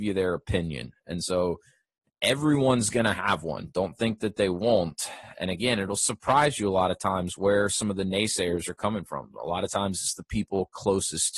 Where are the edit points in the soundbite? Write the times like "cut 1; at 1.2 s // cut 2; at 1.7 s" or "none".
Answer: none